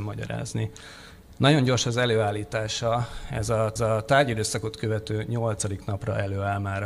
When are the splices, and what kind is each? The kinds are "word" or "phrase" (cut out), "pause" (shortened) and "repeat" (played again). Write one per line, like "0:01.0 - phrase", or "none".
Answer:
0:03.8 - repeat